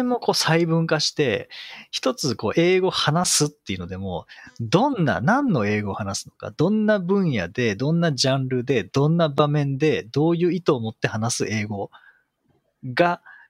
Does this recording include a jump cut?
no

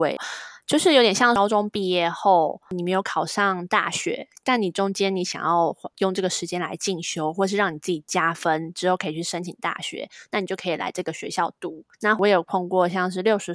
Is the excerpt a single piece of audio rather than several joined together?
no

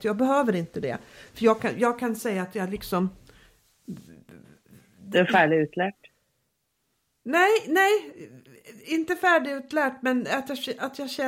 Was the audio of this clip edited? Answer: no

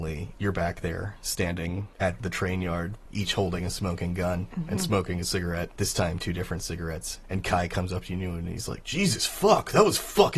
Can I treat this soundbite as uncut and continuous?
yes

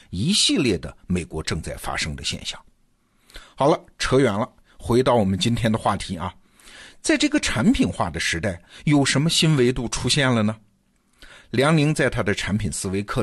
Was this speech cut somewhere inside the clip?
no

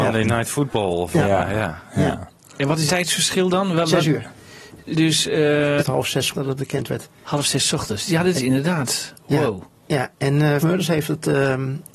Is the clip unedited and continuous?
no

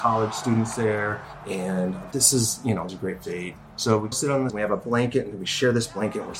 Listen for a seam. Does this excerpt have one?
yes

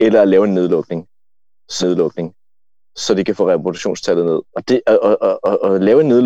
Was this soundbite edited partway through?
yes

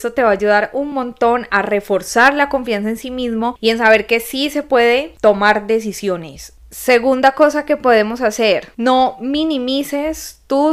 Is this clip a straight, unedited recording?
yes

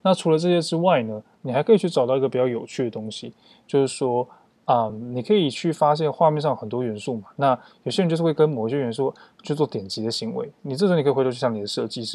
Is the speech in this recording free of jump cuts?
yes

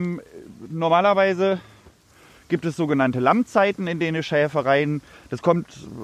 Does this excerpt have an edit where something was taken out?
no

